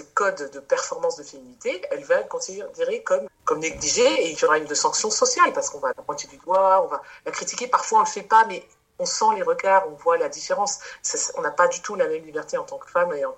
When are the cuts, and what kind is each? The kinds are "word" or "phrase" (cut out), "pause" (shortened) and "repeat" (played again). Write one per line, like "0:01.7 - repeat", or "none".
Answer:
0:03.3 - word
0:04.3 - word
0:04.7 - word
0:05.9 - word

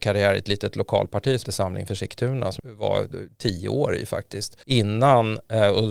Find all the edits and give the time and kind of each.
0:01.4 - word
0:02.6 - word
0:04.6 - pause

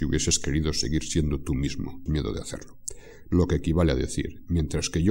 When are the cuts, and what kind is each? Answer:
0:02.1 - phrase

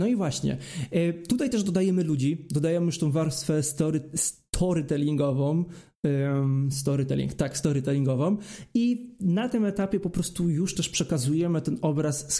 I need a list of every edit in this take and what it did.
none

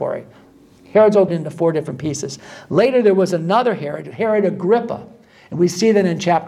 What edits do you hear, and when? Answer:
0:01.3 - phrase

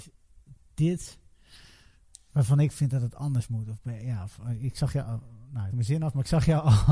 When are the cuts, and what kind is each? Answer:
0:05.7 - phrase

